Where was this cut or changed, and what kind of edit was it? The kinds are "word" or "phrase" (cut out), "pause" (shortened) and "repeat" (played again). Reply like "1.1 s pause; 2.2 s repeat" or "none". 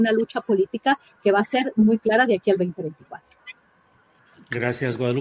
none